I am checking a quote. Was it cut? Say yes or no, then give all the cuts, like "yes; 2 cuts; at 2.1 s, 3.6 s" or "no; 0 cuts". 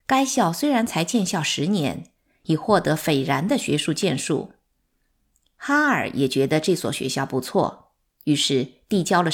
no; 0 cuts